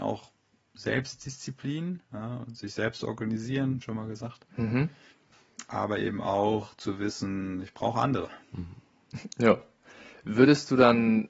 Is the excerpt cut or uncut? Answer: cut